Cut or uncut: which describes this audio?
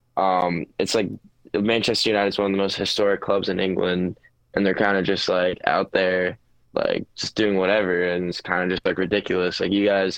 uncut